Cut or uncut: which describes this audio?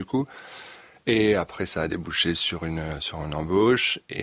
uncut